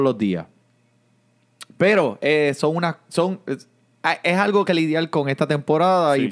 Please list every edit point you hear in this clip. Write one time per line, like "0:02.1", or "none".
0:04.7